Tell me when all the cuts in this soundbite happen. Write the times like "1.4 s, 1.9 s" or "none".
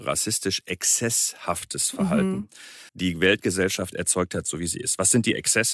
2.9 s